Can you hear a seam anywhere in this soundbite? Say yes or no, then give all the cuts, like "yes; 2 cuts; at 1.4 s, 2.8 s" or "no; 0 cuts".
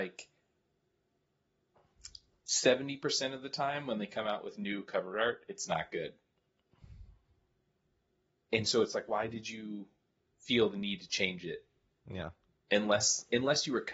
no; 0 cuts